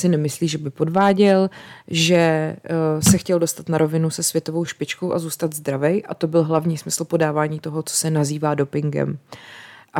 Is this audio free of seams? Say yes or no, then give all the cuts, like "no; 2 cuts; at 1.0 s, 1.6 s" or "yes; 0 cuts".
yes; 0 cuts